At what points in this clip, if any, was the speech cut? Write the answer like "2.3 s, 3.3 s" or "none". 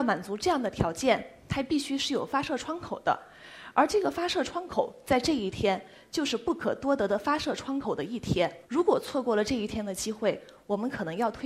8.6 s

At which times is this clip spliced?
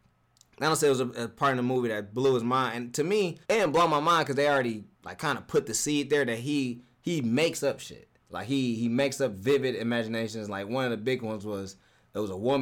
3.4 s, 4.9 s, 8.2 s

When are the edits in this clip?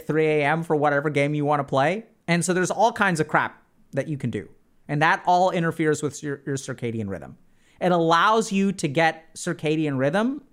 none

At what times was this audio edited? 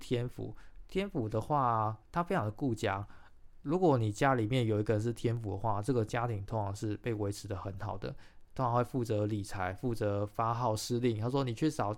2.0 s

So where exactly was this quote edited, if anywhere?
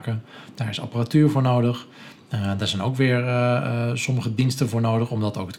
none

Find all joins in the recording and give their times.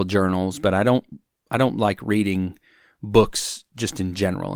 none

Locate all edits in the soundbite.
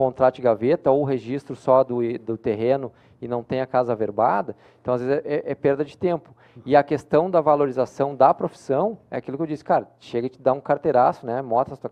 none

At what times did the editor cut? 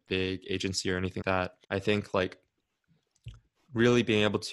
1.2 s, 1.6 s

